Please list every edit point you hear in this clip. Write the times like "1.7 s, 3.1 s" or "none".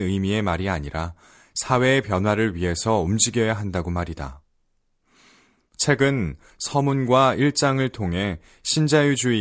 none